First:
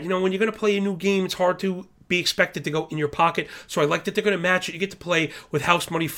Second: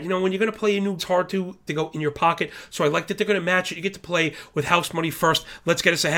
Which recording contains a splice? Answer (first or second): second